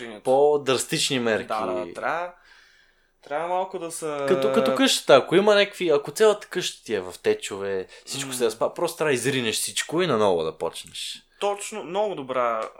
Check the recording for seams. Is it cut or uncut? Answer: uncut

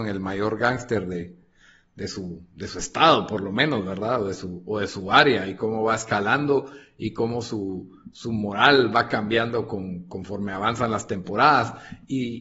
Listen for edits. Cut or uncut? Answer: uncut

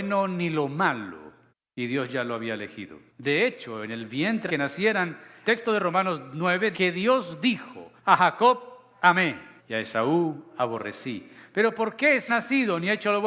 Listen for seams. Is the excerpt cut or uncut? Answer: cut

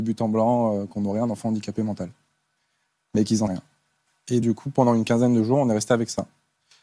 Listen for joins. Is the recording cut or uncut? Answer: cut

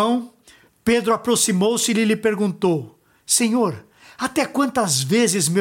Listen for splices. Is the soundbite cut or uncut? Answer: uncut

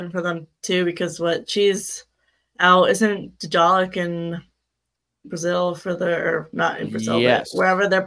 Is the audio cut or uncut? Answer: uncut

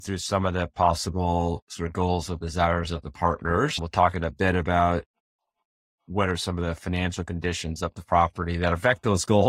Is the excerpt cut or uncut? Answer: uncut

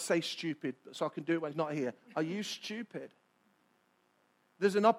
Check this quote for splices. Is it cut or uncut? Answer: cut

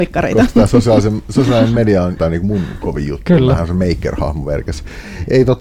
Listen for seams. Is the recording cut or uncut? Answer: cut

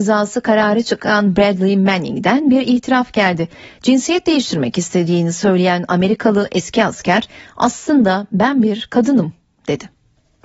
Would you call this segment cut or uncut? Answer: uncut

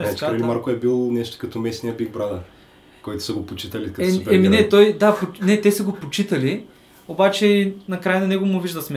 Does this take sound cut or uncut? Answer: uncut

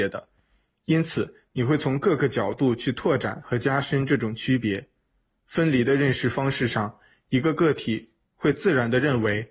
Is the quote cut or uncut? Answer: cut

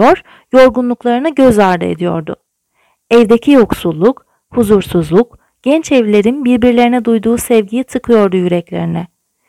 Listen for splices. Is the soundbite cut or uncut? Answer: uncut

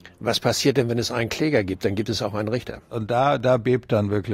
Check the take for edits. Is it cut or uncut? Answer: uncut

